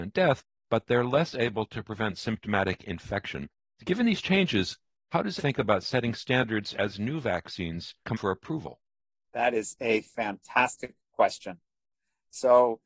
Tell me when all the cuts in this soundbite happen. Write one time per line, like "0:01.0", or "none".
0:05.4
0:08.1